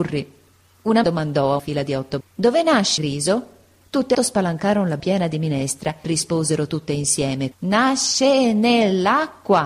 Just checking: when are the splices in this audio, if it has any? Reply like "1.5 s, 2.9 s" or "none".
1.0 s, 1.6 s, 2.2 s, 3.0 s, 4.1 s, 5.0 s, 6.0 s, 7.5 s